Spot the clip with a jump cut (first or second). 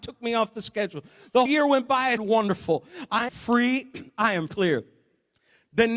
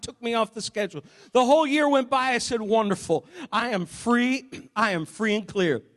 first